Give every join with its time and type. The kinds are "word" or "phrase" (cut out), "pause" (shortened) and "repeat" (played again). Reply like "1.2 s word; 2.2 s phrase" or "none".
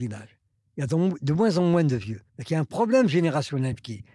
2.3 s pause